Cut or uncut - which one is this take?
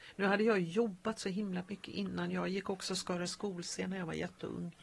uncut